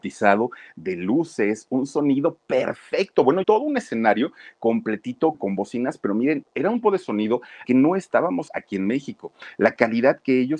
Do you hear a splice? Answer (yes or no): yes